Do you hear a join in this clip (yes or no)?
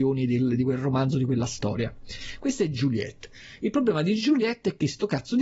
no